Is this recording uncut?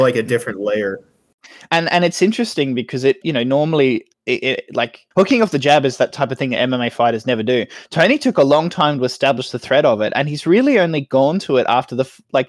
no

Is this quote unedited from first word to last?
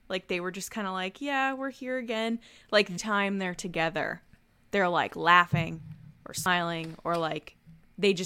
no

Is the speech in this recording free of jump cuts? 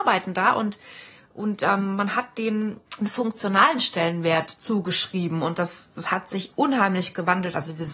no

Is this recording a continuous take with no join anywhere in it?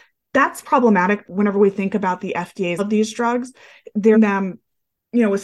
no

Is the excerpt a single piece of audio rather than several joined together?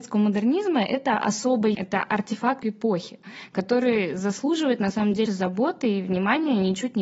no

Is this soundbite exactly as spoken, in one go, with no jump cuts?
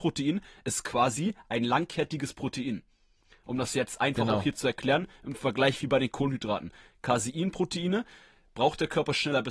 yes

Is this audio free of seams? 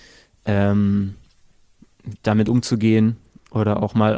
yes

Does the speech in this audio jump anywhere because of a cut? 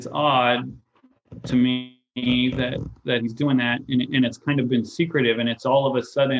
no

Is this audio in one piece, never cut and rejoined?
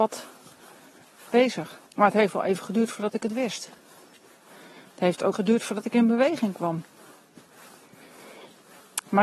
no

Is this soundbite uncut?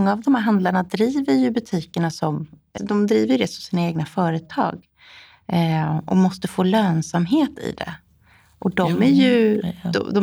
no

